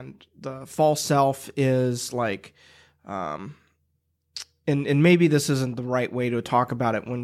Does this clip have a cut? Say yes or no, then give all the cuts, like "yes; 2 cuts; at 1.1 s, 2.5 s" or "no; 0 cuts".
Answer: no; 0 cuts